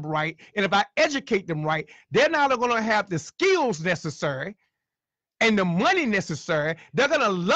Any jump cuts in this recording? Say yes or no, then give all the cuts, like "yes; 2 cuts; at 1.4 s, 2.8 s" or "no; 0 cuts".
no; 0 cuts